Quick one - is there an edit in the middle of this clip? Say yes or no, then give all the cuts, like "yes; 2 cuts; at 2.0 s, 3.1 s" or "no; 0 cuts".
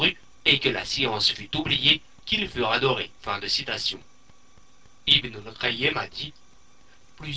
yes; 1 cut; at 3.2 s